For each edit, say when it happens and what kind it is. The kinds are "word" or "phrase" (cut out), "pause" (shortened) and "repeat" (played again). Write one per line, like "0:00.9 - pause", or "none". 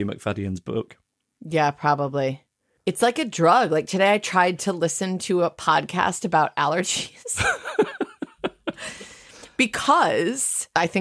none